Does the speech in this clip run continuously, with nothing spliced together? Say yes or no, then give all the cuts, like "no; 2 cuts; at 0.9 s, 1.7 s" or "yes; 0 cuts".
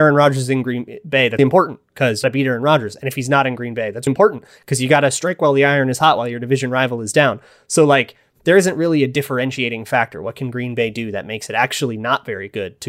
no; 3 cuts; at 1.4 s, 2.2 s, 4.1 s